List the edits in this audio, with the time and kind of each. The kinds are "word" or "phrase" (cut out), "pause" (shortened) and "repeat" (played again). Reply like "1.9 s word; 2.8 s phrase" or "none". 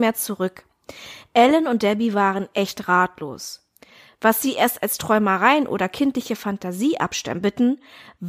none